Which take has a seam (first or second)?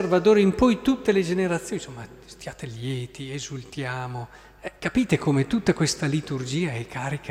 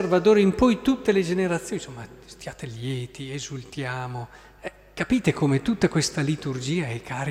first